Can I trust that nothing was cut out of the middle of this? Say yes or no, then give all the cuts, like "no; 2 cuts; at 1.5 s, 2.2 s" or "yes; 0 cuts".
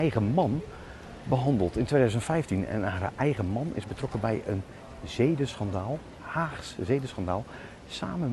yes; 0 cuts